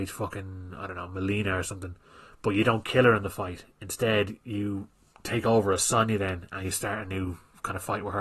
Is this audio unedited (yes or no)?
yes